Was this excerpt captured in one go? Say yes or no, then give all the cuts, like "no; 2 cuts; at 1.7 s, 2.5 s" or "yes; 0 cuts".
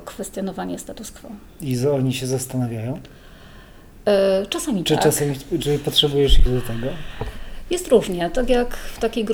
no; 1 cut; at 6.5 s